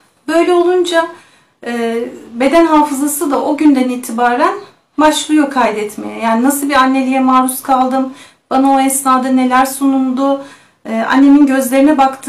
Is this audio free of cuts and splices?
yes; 0 cuts

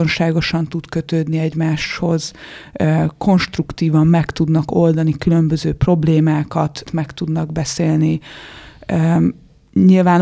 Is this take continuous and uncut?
no; 1 cut; at 6.9 s

